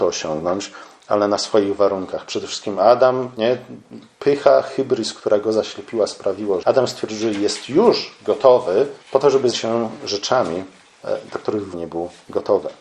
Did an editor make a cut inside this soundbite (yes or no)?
yes